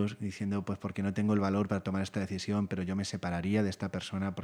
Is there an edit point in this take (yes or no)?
no